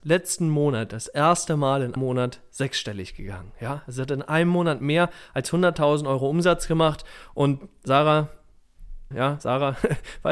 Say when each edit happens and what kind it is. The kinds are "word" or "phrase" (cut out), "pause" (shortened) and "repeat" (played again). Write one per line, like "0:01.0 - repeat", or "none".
0:02.0 - word
0:09.1 - word